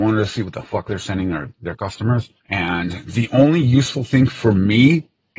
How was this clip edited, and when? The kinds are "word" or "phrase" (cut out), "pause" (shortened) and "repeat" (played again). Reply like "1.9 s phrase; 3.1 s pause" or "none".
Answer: 2.4 s pause